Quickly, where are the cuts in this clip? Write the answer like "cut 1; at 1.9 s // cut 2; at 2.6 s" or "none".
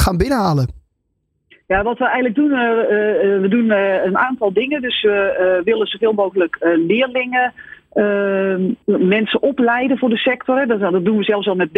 cut 1; at 8.8 s